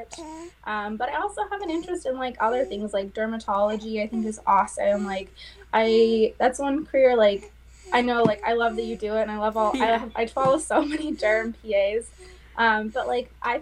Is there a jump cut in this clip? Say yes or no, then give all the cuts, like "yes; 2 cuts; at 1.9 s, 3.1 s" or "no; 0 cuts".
no; 0 cuts